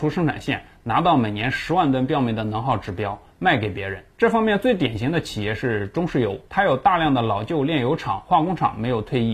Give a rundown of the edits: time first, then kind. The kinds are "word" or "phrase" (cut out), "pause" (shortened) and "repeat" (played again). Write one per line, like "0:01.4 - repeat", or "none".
0:04.1 - pause
0:06.5 - pause